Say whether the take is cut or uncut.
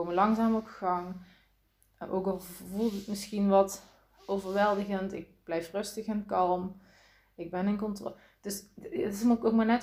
cut